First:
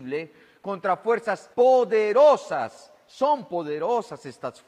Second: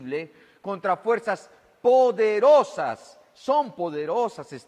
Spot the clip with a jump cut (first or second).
first